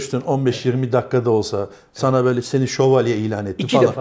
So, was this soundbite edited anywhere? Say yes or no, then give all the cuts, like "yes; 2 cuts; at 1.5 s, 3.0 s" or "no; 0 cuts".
no; 0 cuts